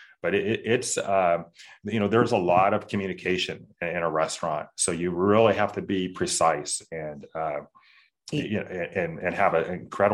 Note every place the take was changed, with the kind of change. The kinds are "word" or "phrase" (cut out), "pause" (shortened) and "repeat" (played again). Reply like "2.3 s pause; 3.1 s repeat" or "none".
none